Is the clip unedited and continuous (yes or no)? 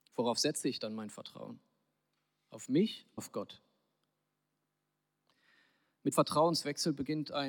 no